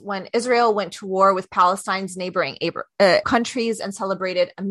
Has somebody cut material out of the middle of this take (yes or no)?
yes